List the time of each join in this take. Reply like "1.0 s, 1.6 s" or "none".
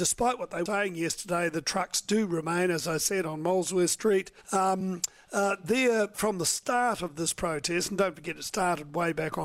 4.4 s, 6.1 s

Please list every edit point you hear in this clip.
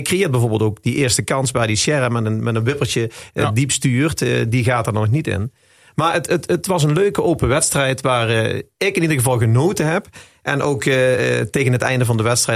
none

